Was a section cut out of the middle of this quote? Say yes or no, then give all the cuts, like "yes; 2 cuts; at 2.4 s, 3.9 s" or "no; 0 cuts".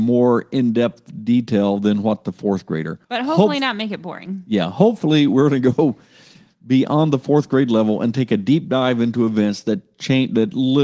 yes; 1 cut; at 3.0 s